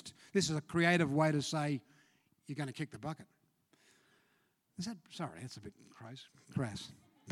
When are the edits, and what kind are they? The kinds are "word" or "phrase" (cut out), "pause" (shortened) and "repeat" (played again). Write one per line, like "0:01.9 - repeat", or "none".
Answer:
none